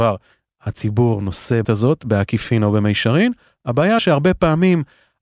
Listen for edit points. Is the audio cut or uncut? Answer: cut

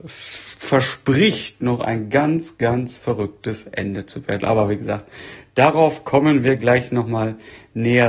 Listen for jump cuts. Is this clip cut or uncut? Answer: uncut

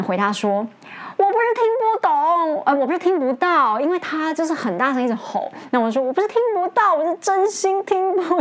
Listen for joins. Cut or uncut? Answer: cut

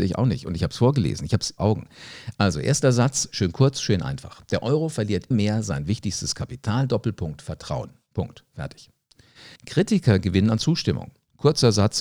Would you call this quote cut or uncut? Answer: cut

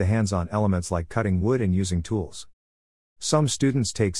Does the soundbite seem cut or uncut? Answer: uncut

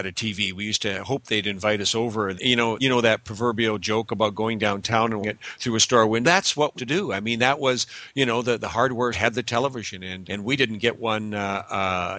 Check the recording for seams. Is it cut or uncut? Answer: cut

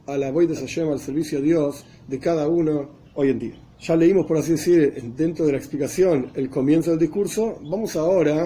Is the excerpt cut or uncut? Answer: cut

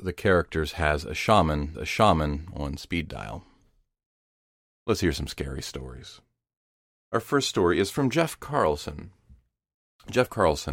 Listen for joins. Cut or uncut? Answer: cut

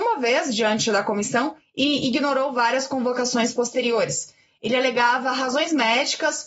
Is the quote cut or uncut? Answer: uncut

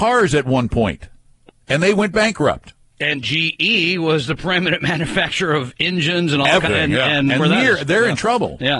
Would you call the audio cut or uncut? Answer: cut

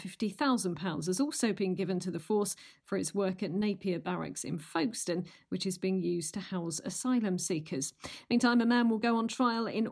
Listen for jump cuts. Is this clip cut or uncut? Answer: uncut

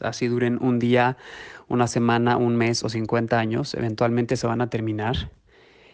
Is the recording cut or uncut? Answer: uncut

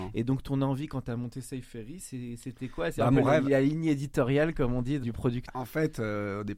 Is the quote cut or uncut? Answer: cut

